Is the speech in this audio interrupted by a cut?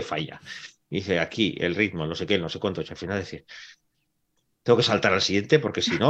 no; 0 cuts

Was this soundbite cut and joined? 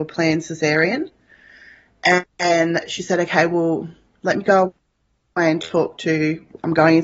no; 0 cuts

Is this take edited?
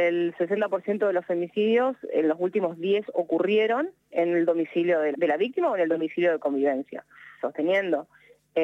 yes; 4 cuts; at 3.0 s, 4.1 s, 5.1 s, 7.4 s

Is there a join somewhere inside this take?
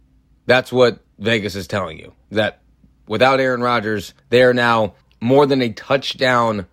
yes; 4 cuts; at 1.1 s, 2.2 s, 4.2 s, 5.0 s

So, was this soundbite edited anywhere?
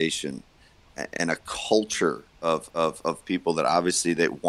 yes; 1 cut; at 2.7 s

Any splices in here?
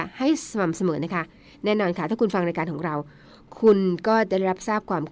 no; 0 cuts

